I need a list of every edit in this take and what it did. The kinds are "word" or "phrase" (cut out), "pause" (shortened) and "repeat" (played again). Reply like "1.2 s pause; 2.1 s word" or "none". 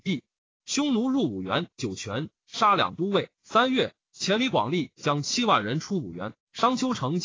3.4 s pause